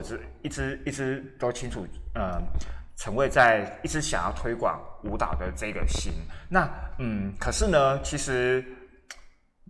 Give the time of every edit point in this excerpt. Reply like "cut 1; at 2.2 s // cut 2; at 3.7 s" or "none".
none